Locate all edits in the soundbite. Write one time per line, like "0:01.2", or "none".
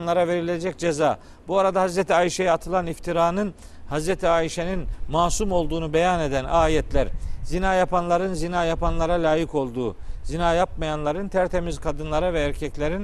none